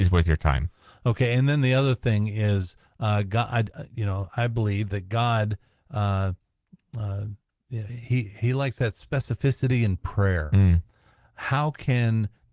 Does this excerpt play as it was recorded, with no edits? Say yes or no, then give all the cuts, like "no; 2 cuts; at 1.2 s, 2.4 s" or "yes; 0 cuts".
yes; 0 cuts